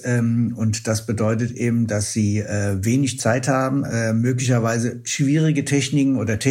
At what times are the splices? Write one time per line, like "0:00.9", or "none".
none